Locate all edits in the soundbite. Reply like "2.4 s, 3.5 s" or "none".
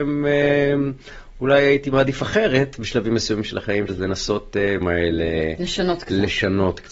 3.9 s, 4.8 s